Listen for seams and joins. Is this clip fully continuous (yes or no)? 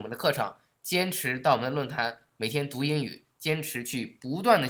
yes